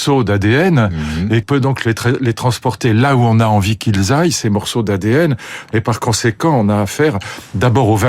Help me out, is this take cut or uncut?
cut